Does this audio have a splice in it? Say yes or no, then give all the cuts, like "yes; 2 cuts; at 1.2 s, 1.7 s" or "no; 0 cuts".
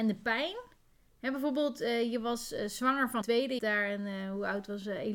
yes; 2 cuts; at 3.2 s, 3.6 s